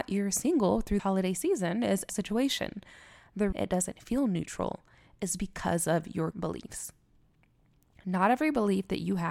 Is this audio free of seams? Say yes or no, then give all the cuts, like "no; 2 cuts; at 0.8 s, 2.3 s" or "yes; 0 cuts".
no; 4 cuts; at 1.0 s, 2.1 s, 3.5 s, 6.3 s